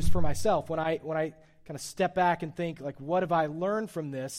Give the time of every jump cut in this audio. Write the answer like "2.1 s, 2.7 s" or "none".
none